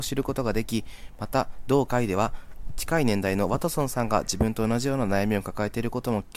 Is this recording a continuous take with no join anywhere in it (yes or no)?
yes